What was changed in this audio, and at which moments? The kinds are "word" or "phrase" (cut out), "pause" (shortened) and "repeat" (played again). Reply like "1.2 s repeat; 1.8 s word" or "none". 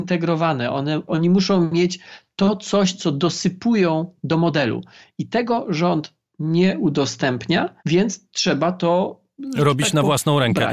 1.1 s word; 7.8 s pause